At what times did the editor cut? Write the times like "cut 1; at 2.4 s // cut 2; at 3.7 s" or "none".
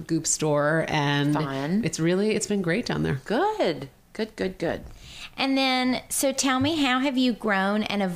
none